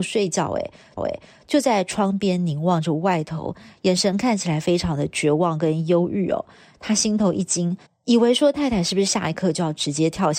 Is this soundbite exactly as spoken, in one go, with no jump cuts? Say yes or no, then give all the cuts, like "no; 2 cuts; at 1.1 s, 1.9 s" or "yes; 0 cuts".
no; 2 cuts; at 1.0 s, 7.9 s